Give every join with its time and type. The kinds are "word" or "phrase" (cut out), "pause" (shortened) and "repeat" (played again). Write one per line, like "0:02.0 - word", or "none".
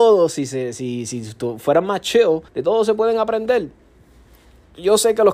0:02.5 - pause